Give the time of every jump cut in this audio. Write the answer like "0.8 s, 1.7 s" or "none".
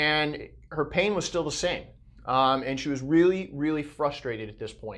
none